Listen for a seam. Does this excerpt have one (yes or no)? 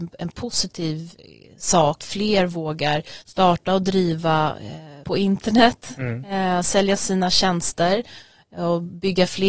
yes